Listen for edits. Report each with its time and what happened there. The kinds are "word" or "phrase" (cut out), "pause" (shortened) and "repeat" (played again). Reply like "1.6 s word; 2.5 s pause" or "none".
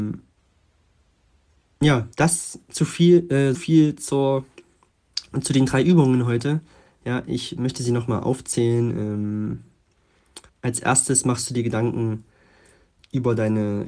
2.1 s pause; 3.5 s word; 10.5 s pause